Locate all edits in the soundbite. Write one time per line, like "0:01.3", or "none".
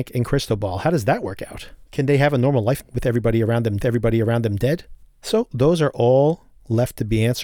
0:01.8
0:02.8
0:03.8